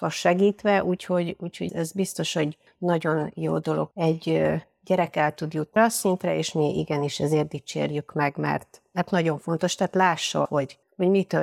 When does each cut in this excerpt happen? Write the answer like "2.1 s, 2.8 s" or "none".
1.7 s, 3.9 s, 5.8 s, 10.5 s